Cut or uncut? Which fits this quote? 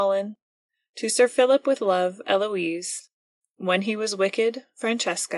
uncut